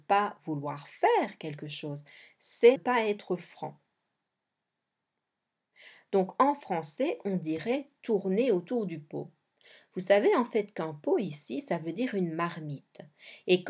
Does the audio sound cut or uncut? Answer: cut